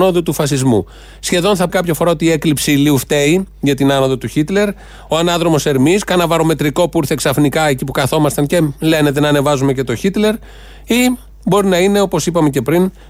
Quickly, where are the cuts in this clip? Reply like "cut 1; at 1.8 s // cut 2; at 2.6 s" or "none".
cut 1; at 1.7 s